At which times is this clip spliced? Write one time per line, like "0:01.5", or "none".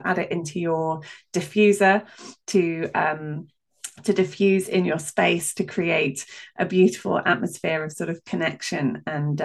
none